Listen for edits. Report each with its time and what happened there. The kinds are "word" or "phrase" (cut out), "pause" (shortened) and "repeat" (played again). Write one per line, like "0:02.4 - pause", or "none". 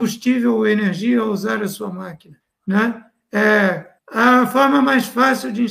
0:02.4 - pause
0:04.0 - pause